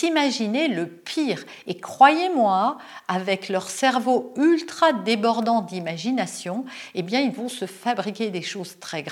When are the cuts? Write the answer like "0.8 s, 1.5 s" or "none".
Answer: none